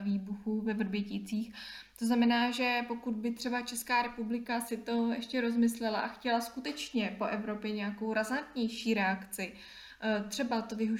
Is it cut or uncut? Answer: uncut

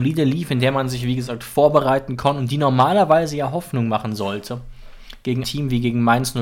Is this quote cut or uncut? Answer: cut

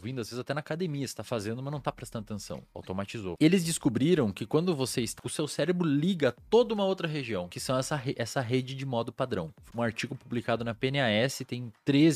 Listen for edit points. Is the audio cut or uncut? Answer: cut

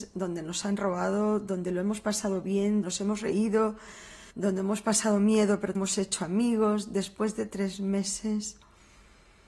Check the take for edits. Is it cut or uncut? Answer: cut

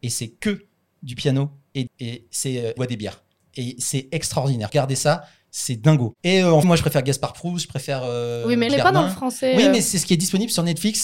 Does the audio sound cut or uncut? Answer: cut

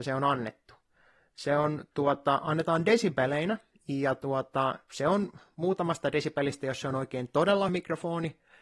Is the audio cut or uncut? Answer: cut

